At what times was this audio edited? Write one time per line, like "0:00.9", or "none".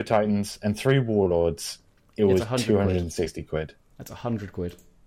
none